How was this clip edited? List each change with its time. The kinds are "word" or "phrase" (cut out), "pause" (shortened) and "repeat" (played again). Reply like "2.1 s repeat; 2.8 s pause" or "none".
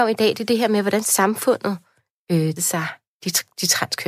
1.0 s word; 2.6 s word